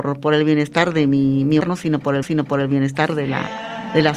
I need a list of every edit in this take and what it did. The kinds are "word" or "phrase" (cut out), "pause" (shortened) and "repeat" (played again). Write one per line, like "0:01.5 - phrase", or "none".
0:01.6 - word
0:02.2 - repeat